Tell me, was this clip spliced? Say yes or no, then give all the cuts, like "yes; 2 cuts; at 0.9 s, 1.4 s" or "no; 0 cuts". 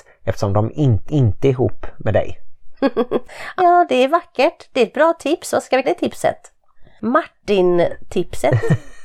yes; 3 cuts; at 1.1 s, 3.6 s, 5.8 s